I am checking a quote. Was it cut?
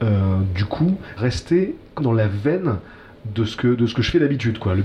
yes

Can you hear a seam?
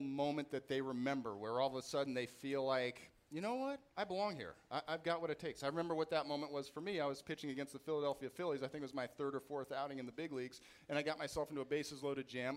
no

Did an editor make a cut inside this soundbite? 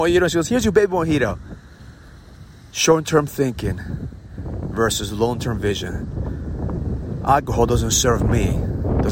no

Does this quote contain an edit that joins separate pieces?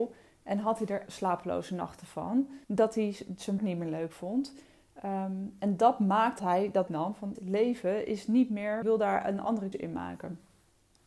yes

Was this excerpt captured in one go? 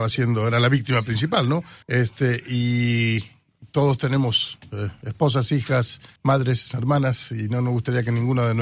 no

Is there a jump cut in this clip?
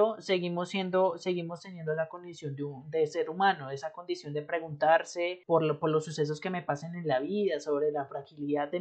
yes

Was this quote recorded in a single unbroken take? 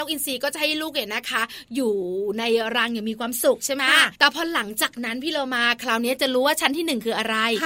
no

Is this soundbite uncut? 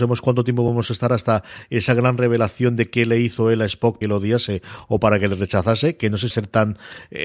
no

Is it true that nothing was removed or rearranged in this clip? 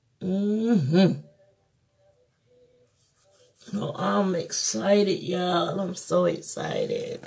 yes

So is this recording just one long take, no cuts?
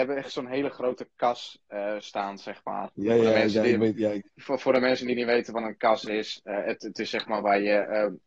yes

